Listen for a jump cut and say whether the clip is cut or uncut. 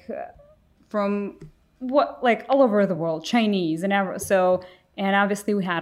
uncut